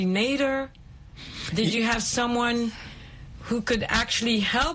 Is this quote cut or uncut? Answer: uncut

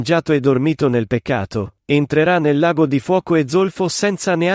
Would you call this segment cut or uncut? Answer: uncut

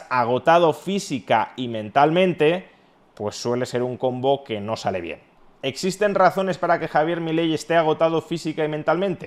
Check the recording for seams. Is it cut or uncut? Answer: uncut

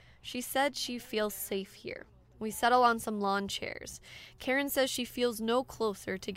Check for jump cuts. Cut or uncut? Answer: uncut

